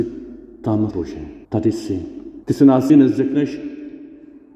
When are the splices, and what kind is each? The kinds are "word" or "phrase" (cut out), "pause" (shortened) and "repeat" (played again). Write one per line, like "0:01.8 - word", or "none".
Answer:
0:00.9 - word
0:01.4 - pause
0:02.4 - pause
0:02.9 - word